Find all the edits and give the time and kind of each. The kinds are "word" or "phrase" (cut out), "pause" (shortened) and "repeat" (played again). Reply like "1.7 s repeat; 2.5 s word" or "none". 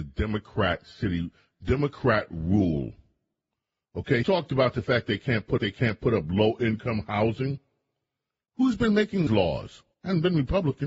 4.2 s word; 5.6 s repeat; 9.3 s word; 9.9 s pause